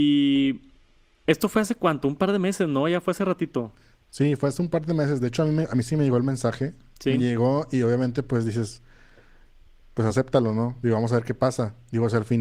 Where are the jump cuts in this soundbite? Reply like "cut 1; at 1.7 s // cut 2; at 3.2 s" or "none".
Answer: none